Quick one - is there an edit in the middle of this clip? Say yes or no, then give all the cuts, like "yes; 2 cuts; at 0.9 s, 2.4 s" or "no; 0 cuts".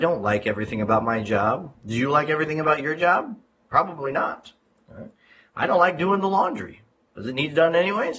no; 0 cuts